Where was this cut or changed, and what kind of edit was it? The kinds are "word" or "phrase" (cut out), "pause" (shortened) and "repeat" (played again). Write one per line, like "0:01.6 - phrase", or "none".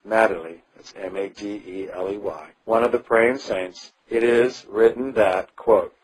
0:02.5 - pause
0:04.0 - pause